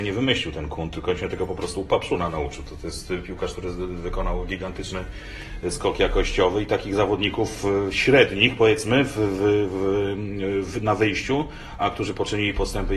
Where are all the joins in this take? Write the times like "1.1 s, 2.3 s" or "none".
11.8 s